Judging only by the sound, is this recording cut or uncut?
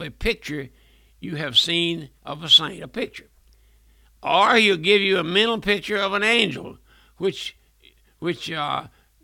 uncut